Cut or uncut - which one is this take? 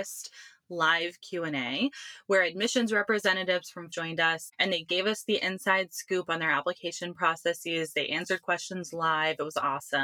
cut